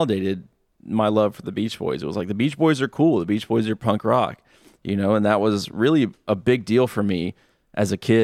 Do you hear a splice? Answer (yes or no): no